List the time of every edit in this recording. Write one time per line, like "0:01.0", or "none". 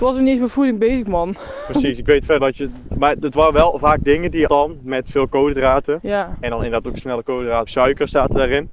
0:02.4
0:04.5
0:07.0
0:07.7